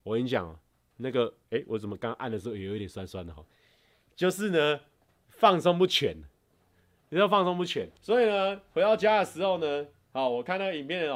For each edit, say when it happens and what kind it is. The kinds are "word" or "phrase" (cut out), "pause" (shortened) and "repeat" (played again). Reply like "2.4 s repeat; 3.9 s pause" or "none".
8.0 s pause